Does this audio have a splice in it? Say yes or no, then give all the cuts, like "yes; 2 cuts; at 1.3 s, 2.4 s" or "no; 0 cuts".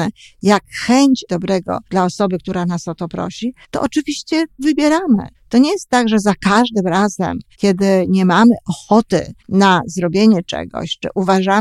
yes; 7 cuts; at 1.3 s, 1.8 s, 3.6 s, 4.6 s, 5.3 s, 7.5 s, 9.4 s